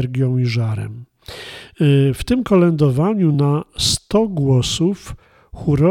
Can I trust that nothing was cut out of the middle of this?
yes; 0 cuts

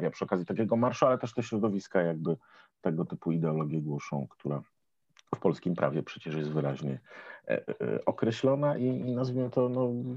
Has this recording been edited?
no; 0 cuts

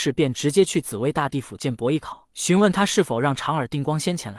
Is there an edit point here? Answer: yes; 1 cut; at 2.3 s

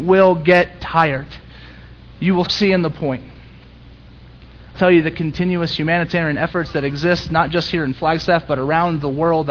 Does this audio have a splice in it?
yes; 2 cuts; at 2.4 s, 4.7 s

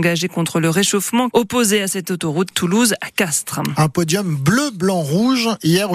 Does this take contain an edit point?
yes; 2 cuts; at 1.3 s, 2.5 s

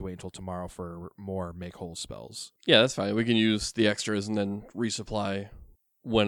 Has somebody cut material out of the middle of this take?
yes; 1 cut; at 2.6 s

